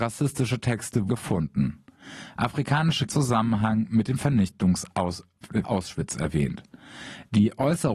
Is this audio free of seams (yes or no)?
no